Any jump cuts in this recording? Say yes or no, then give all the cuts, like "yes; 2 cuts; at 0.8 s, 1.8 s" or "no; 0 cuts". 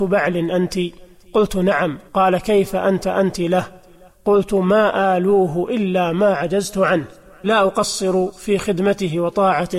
yes; 3 cuts; at 2.1 s, 3.0 s, 7.4 s